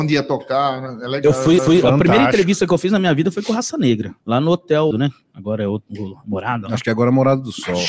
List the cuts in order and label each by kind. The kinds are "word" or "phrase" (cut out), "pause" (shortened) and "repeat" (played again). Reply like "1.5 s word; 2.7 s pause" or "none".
1.6 s repeat; 4.2 s pause; 4.9 s word